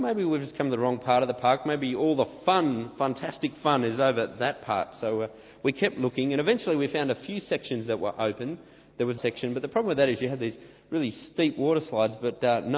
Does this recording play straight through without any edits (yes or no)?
no